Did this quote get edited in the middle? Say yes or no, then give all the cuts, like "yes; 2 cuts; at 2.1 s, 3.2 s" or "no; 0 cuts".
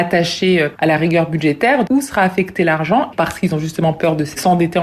yes; 1 cut; at 1.9 s